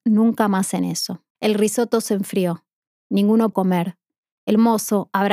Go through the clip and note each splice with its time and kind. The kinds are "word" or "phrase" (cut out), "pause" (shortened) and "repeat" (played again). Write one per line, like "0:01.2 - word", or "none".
0:01.3 - pause
0:03.5 - word